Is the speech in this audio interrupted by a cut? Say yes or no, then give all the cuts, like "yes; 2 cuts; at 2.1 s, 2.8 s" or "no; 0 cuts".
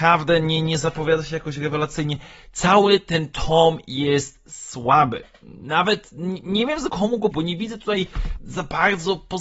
yes; 3 cuts; at 6.9 s, 7.3 s, 8.4 s